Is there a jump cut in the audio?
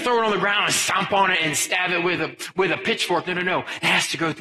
no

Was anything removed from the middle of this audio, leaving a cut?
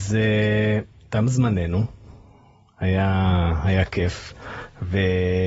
no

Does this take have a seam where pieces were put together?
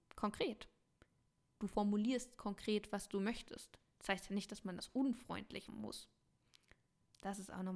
yes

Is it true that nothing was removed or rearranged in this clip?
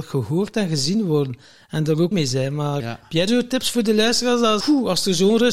no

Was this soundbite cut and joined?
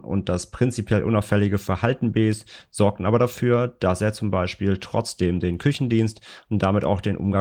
no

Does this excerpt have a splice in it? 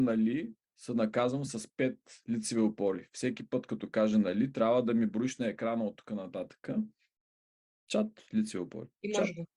no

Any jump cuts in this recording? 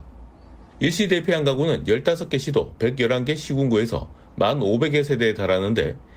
no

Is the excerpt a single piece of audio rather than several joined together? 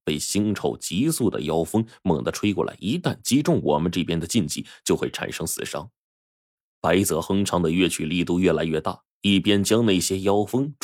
yes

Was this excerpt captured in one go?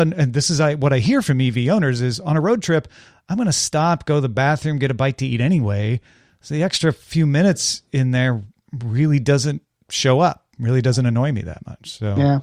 yes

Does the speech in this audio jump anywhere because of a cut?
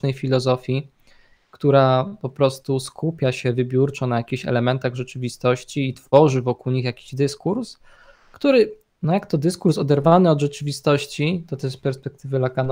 no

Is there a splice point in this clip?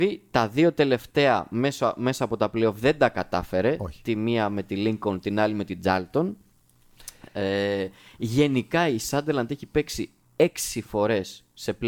no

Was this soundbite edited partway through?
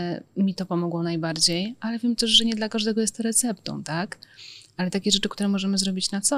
no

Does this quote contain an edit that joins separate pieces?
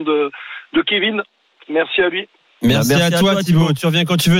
no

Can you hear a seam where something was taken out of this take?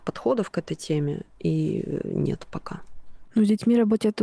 no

